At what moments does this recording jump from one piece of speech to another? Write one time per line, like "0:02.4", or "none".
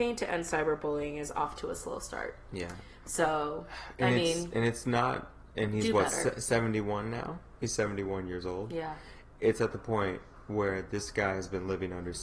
none